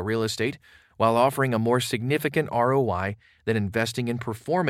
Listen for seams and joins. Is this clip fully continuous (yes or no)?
yes